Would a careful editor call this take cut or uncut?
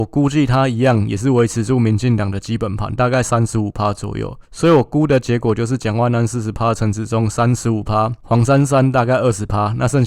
cut